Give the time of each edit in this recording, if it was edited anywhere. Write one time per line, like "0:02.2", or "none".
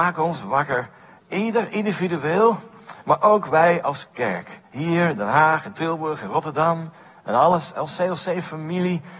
none